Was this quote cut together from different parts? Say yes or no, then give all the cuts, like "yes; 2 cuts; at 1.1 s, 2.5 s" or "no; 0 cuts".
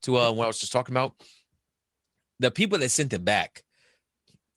no; 0 cuts